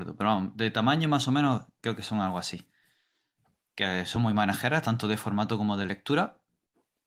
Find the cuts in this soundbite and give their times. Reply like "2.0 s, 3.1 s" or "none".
none